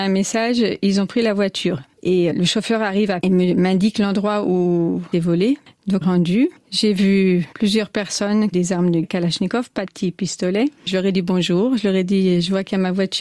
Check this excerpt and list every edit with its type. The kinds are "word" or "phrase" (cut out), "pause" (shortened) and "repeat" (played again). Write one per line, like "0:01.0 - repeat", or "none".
0:02.3 - word
0:03.2 - word
0:05.1 - phrase
0:06.0 - phrase
0:07.5 - pause
0:08.5 - phrase
0:09.0 - word
0:09.8 - word